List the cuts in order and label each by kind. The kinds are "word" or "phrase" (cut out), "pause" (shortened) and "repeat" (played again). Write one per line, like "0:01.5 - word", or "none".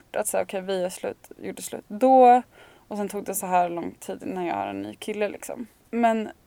none